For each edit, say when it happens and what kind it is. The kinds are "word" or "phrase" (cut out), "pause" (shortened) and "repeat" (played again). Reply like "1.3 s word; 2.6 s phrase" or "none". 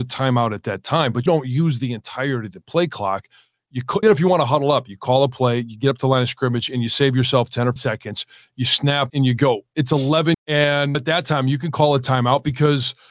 1.3 s word; 4.0 s word; 7.8 s word; 9.1 s word; 10.3 s word; 10.9 s word